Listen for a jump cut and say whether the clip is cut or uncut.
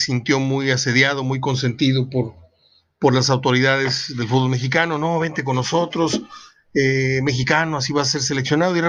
uncut